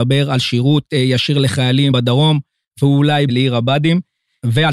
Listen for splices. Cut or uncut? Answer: cut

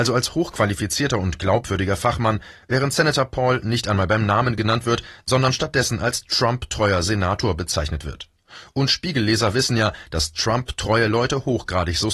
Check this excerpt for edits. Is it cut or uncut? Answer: uncut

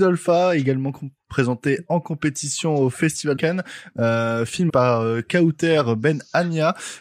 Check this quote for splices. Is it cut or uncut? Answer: cut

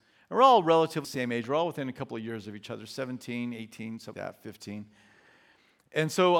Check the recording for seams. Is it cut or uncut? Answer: cut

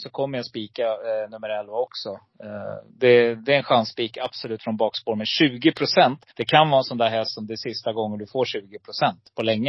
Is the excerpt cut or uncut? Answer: cut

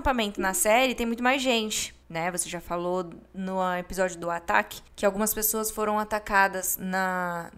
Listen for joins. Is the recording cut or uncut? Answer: cut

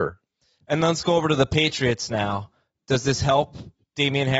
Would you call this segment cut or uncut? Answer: uncut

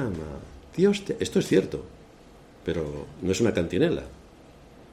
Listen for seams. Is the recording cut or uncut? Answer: uncut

